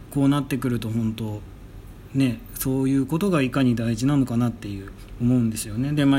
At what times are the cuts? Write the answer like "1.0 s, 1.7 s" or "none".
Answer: 5.2 s